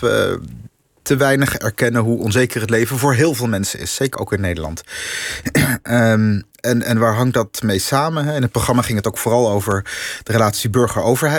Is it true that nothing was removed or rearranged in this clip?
no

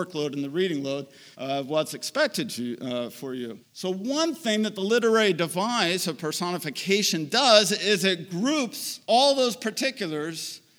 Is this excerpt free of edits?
no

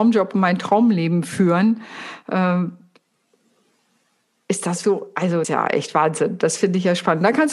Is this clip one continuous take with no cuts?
no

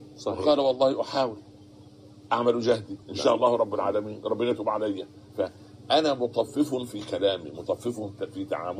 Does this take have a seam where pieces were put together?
yes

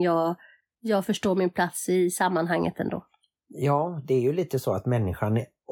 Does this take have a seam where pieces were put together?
no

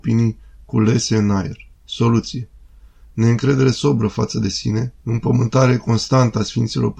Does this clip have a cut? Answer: yes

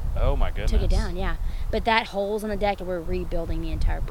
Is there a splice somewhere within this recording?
yes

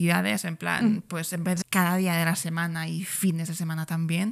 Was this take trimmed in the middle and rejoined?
yes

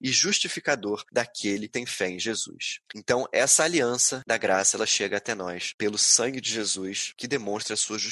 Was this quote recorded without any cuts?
no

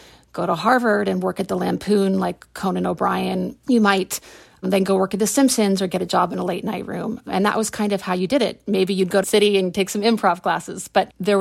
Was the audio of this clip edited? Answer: yes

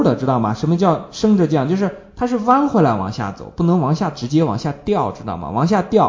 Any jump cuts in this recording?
no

